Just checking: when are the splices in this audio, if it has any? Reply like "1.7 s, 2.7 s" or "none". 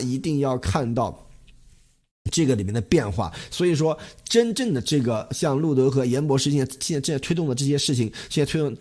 none